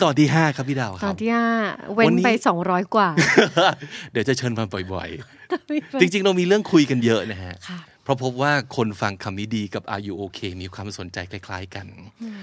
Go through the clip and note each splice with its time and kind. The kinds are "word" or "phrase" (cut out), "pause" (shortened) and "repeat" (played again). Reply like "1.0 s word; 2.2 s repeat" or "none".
none